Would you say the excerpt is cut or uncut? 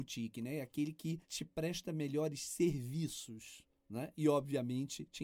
cut